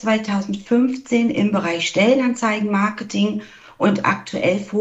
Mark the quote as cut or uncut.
uncut